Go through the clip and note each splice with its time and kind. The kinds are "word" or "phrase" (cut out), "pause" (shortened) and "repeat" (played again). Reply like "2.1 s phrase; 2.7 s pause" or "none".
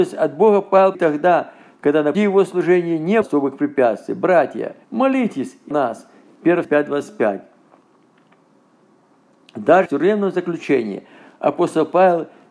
0.9 s phrase; 2.1 s word; 3.2 s word; 4.8 s pause; 5.7 s word; 6.6 s word; 9.9 s word